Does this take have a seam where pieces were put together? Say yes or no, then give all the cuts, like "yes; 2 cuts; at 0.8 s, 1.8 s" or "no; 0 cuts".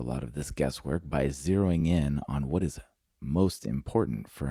no; 0 cuts